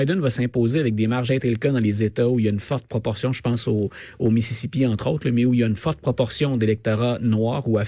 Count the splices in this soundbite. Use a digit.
1